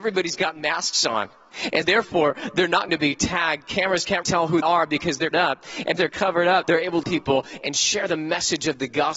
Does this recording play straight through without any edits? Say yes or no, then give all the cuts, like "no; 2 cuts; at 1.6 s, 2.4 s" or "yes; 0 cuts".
no; 8 cuts; at 1.8 s, 2.9 s, 4.2 s, 4.6 s, 5.3 s, 6.0 s, 6.6 s, 7.0 s